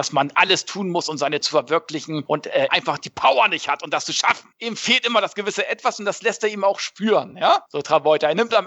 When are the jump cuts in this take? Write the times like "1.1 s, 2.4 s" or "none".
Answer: 1.4 s, 2.7 s